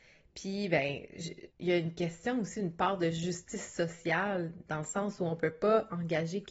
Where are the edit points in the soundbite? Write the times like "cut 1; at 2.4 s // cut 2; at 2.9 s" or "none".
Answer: cut 1; at 1.5 s